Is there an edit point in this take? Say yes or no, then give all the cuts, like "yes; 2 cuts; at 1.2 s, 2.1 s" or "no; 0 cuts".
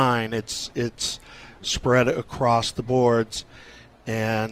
no; 0 cuts